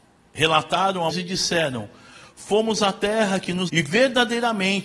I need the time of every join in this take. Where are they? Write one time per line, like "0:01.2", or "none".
0:01.1
0:03.7